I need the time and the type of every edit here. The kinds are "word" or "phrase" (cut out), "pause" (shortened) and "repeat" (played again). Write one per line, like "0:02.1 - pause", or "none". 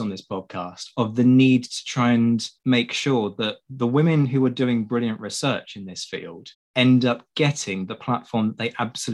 0:02.6 - pause
0:06.5 - pause